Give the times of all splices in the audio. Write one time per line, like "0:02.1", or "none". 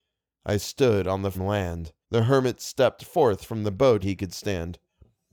0:01.3
0:02.0
0:04.0